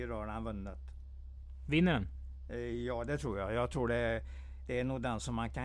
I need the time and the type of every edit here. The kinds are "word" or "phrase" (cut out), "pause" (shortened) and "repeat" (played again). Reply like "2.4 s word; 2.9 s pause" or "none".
none